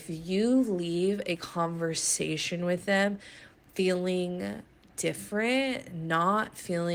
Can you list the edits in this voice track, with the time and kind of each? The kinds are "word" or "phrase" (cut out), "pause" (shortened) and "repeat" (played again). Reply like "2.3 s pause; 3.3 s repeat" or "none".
none